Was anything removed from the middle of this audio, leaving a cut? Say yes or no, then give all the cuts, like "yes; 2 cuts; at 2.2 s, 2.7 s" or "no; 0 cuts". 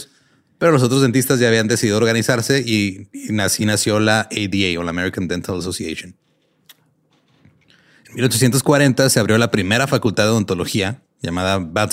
no; 0 cuts